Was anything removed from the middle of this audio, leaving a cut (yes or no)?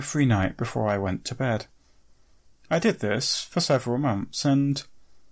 no